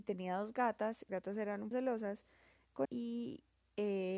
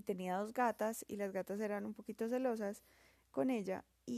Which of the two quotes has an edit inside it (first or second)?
first